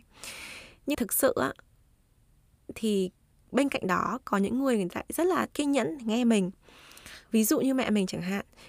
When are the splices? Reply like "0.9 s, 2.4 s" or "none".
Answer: 0.9 s, 5.5 s, 7.2 s